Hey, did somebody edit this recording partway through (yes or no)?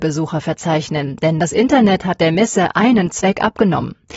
no